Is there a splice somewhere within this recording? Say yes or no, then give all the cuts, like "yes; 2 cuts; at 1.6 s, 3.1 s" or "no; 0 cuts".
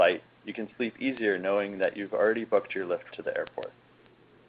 yes; 1 cut; at 3.1 s